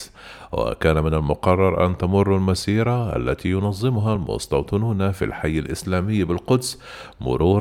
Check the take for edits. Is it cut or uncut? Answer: uncut